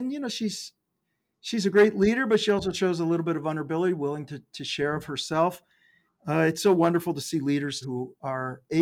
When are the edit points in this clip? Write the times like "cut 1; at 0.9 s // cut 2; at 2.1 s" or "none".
cut 1; at 7.8 s